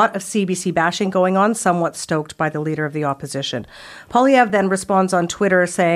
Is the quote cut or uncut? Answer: uncut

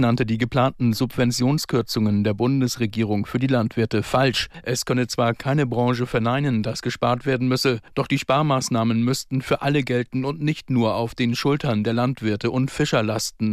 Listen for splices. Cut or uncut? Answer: uncut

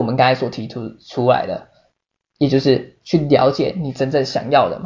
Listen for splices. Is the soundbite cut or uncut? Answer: uncut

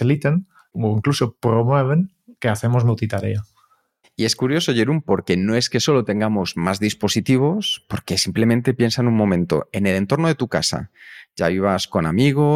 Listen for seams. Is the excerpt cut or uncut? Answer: uncut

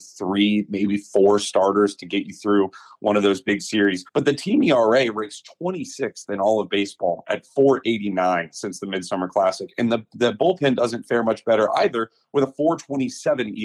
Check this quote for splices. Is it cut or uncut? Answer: cut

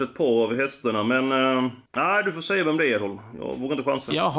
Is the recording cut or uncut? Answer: cut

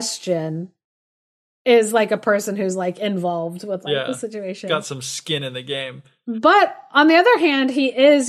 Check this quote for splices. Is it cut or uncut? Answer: uncut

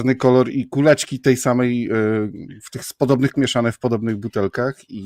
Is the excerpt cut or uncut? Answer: cut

